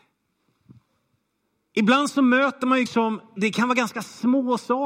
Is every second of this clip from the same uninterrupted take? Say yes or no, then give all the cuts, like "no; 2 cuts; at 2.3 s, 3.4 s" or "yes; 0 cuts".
no; 2 cuts; at 2.9 s, 3.4 s